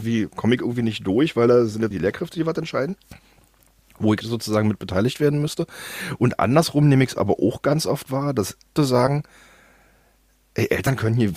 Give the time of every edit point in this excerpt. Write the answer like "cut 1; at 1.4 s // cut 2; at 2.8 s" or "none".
cut 1; at 1.9 s // cut 2; at 4.2 s // cut 3; at 8.8 s